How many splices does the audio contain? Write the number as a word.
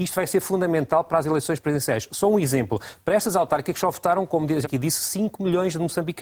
one